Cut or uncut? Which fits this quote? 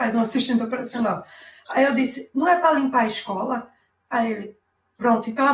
uncut